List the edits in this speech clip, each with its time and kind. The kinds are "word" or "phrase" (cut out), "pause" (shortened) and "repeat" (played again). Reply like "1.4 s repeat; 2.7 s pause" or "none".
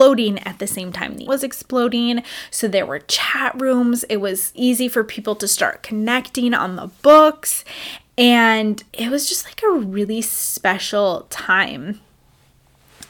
1.3 s word; 4.5 s word; 8.9 s pause